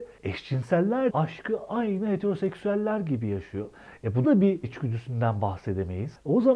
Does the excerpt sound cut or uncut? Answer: cut